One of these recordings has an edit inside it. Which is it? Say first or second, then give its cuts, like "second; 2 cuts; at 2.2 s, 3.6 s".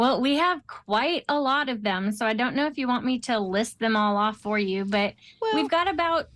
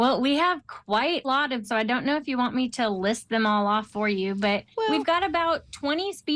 second; 3 cuts; at 1.2 s, 1.6 s, 4.7 s